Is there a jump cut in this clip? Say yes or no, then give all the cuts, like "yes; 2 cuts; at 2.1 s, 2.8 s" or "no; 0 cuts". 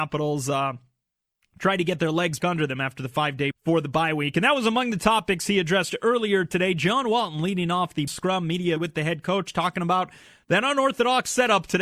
yes; 4 cuts; at 2.4 s, 3.5 s, 8.1 s, 8.8 s